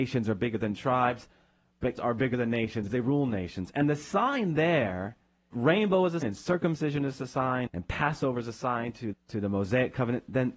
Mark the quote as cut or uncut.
cut